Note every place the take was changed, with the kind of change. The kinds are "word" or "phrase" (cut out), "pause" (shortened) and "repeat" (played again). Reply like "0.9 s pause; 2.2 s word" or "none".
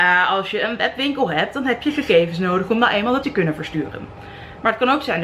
3.2 s word